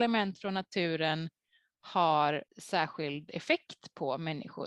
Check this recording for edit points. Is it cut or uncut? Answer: cut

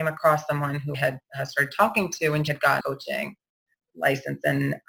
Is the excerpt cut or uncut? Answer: cut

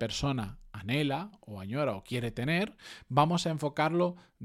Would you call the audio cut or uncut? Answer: uncut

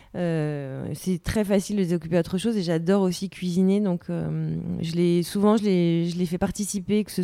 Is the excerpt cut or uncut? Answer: uncut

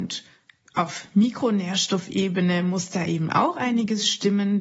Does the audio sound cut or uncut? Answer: uncut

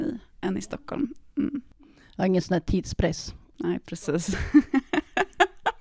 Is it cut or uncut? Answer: uncut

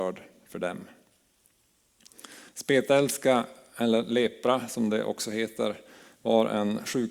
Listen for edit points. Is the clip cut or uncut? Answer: cut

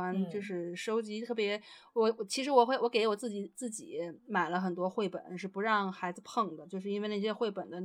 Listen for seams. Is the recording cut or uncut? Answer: cut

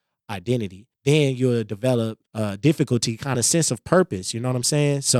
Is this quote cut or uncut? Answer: cut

